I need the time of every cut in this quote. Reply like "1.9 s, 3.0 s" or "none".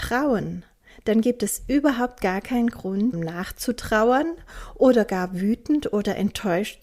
3.1 s